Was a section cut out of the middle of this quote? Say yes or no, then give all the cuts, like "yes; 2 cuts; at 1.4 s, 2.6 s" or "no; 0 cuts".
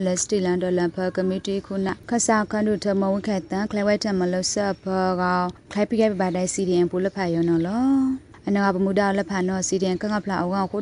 no; 0 cuts